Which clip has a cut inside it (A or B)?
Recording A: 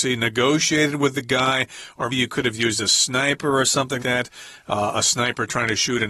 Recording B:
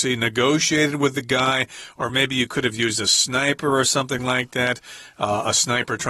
A